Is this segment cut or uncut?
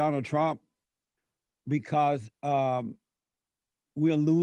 uncut